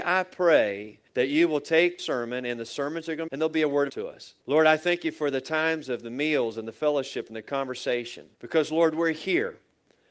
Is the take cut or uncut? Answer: cut